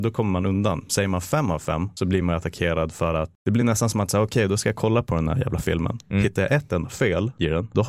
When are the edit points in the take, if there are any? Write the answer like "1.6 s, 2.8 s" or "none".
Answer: none